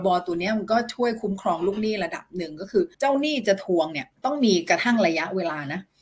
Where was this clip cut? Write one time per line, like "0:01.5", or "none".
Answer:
0:02.9
0:04.1

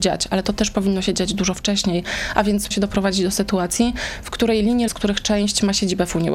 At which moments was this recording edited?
0:02.7
0:04.9

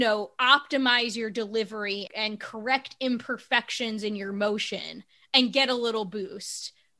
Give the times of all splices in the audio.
0:02.1

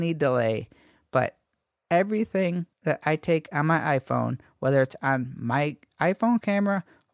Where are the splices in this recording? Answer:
0:02.7

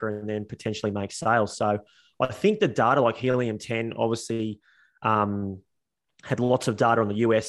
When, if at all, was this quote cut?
none

